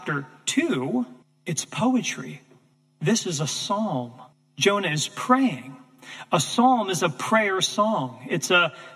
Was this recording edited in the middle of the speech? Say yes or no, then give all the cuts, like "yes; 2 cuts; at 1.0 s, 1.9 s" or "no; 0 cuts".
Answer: yes; 3 cuts; at 1.2 s, 2.7 s, 4.3 s